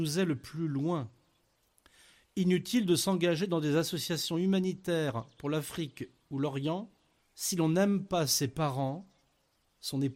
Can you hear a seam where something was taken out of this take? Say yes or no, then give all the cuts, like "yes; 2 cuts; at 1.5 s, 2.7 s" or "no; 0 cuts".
yes; 2 cuts; at 1.5 s, 7.2 s